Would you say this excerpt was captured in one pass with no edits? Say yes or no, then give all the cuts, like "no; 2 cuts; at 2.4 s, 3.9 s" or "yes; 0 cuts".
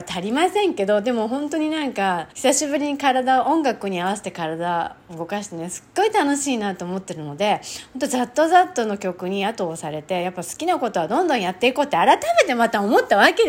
no; 1 cut; at 2.3 s